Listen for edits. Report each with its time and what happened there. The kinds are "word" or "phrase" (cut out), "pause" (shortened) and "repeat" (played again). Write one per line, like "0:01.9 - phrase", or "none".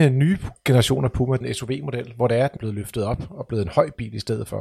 0:01.4 - phrase
0:02.6 - word